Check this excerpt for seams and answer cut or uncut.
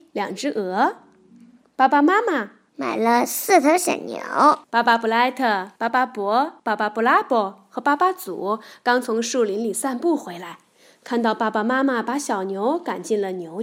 cut